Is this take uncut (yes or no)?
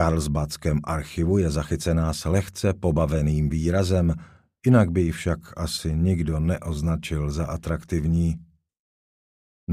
yes